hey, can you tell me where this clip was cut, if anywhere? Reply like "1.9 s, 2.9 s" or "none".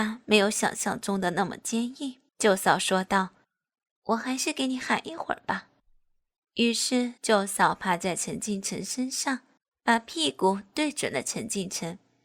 2.3 s, 3.4 s, 5.8 s, 7.2 s, 9.6 s